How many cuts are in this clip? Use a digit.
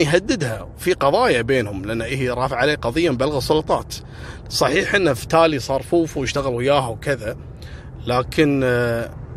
0